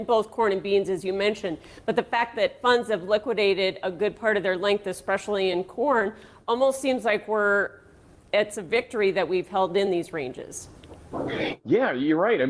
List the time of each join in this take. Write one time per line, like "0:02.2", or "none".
none